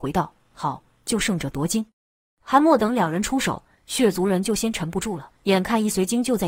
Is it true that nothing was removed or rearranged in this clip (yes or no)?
no